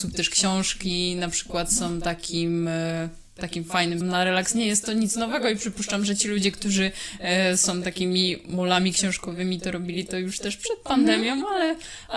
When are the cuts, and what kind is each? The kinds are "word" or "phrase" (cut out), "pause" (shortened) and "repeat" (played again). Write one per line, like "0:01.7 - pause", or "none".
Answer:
0:04.0 - word